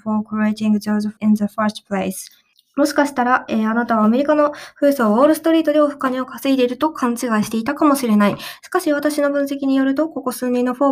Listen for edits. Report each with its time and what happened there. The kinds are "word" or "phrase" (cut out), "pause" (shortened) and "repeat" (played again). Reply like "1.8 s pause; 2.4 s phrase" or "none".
1.2 s word; 2.5 s pause